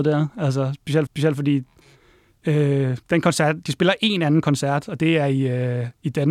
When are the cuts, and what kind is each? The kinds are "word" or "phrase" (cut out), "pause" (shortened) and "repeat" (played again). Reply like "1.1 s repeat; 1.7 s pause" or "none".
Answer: 1.1 s repeat